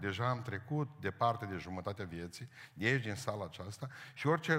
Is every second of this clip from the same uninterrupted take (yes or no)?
yes